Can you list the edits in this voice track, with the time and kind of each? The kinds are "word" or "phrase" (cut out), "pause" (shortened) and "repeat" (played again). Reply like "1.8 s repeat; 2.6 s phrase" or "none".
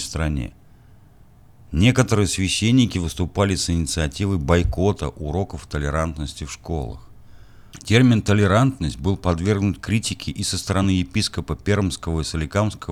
none